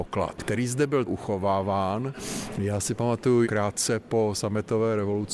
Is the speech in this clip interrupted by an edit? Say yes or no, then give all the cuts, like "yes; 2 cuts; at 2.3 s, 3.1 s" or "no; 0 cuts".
yes; 2 cuts; at 1.1 s, 3.4 s